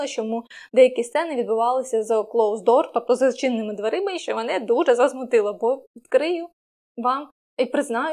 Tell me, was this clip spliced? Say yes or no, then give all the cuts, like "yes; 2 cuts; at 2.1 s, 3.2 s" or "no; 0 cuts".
no; 0 cuts